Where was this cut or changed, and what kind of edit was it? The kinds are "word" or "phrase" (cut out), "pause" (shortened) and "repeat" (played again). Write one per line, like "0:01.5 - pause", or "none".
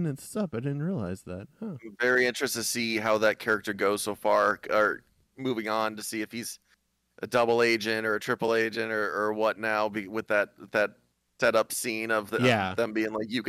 none